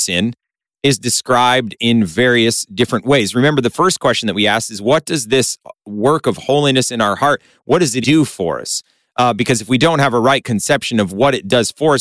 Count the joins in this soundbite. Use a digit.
1